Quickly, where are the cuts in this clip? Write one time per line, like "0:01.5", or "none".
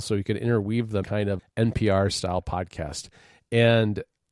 0:01.0
0:01.4